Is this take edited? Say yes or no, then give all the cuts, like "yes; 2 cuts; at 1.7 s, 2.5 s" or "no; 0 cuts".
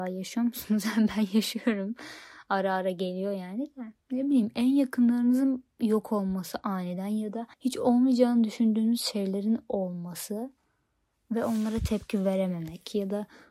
yes; 2 cuts; at 4.0 s, 7.5 s